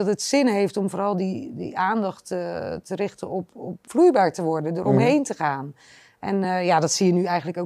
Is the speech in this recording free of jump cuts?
yes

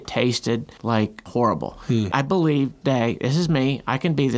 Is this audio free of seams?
no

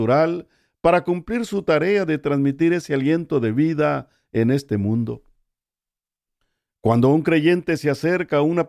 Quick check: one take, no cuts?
yes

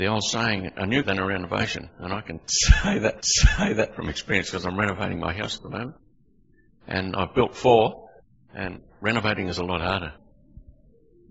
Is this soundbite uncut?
no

